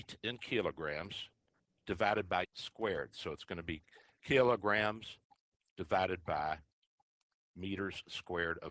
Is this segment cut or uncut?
cut